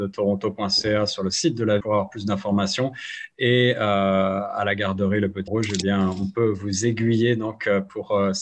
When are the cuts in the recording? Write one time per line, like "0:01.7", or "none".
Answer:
0:01.8
0:05.5